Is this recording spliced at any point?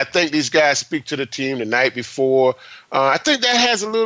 no; 0 cuts

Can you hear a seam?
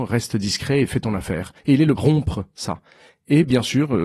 yes; 2 cuts; at 1.6 s, 2.0 s

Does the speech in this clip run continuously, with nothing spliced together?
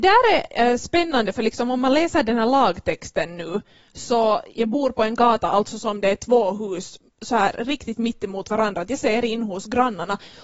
yes; 0 cuts

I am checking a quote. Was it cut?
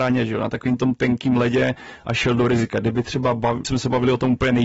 yes; 1 cut; at 3.6 s

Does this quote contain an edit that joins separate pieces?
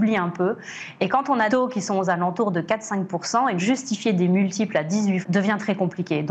yes; 3 cuts; at 1.5 s, 3.6 s, 5.2 s

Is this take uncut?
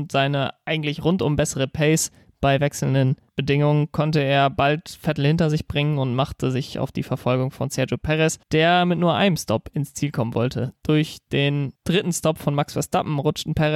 no; 2 cuts; at 8.4 s, 11.8 s

